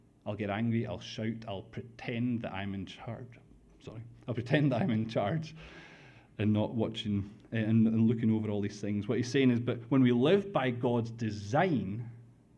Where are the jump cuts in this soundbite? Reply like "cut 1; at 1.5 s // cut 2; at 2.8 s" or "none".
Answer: none